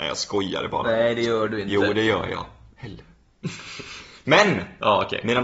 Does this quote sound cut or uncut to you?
uncut